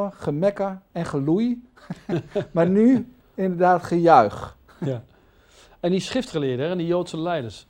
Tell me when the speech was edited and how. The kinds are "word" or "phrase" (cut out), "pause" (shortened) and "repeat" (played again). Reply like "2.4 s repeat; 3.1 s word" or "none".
none